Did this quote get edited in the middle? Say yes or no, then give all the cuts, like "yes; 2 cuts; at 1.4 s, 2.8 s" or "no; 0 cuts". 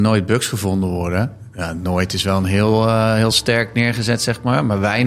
no; 0 cuts